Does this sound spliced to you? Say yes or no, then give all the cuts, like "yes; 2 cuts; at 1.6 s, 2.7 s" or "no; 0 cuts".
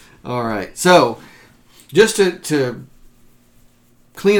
no; 0 cuts